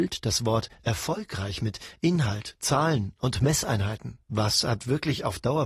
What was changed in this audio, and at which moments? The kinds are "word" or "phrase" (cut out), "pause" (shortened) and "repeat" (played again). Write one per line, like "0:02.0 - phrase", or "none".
0:04.2 - pause